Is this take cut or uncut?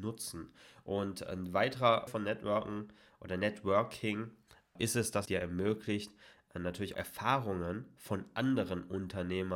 cut